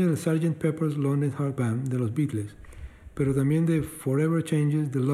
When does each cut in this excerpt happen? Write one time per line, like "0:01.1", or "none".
0:01.6